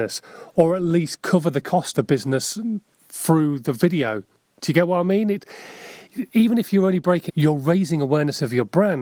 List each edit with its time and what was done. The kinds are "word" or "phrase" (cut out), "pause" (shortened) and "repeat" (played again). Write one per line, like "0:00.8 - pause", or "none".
0:01.9 - word
0:07.3 - word